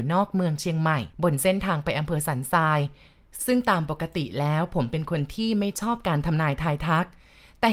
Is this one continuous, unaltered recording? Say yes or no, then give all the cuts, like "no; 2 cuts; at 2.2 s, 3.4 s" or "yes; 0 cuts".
no; 1 cut; at 1.1 s